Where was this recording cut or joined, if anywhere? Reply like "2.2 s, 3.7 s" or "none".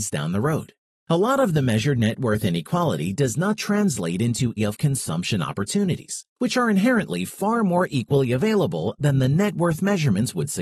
1.0 s, 4.6 s, 6.3 s